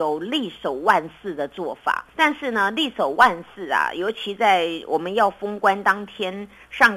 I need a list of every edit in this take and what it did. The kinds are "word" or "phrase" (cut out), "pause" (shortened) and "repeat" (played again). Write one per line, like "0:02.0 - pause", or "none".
0:02.1 - pause

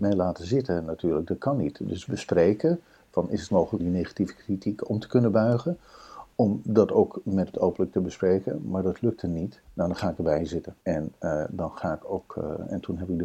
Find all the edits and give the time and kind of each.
0:02.1 - phrase
0:03.5 - word
0:03.8 - word
0:07.5 - word
0:09.6 - pause
0:10.8 - pause

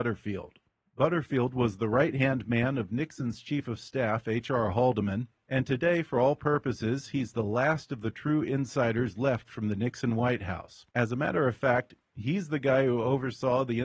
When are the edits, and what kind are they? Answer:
0:10.9 - pause

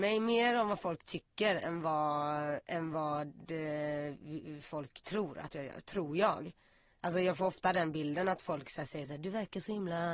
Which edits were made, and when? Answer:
none

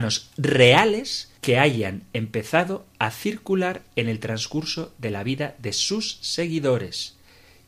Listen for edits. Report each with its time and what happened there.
0:01.4 - pause

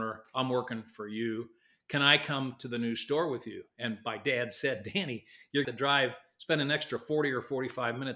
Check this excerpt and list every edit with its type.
0:05.6 - phrase

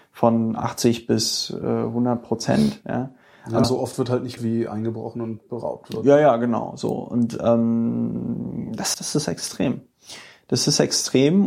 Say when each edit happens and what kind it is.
0:03.6 - word
0:04.4 - word
0:08.9 - word

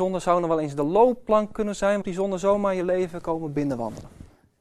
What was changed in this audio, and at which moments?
0:02.0 - word

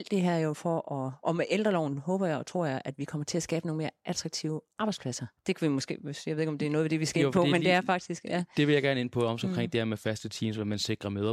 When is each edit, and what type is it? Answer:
0:05.4 - pause

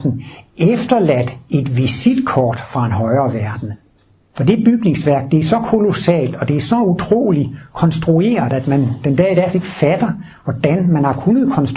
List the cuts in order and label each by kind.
0:09.5 - word

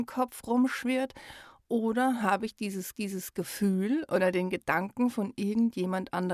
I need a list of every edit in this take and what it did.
0:02.9 - repeat

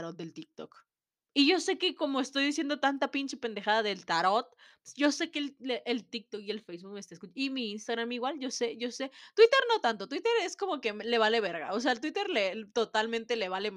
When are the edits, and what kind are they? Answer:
none

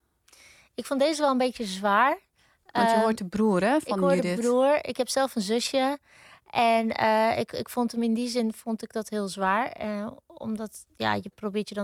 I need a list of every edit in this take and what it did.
none

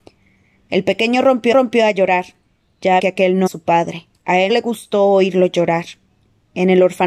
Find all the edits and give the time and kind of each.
0:01.5 - repeat
0:03.0 - phrase
0:03.5 - word
0:04.1 - pause
0:04.5 - word

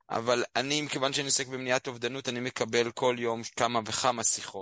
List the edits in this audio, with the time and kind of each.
none

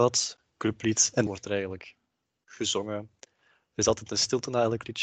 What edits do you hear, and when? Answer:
0:01.3 - word

